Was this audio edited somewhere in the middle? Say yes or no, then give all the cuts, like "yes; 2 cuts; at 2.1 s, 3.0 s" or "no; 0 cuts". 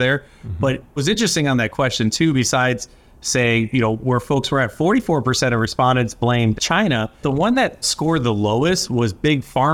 yes; 4 cuts; at 1.0 s, 6.6 s, 7.2 s, 7.8 s